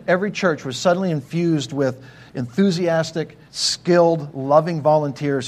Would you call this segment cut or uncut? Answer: cut